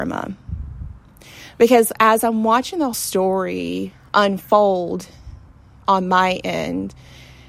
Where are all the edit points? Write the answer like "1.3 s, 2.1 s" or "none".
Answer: 2.9 s